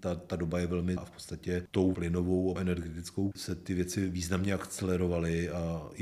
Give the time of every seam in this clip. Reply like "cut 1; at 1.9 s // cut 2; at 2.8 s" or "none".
cut 1; at 1.0 s // cut 2; at 1.9 s // cut 3; at 2.6 s // cut 4; at 3.3 s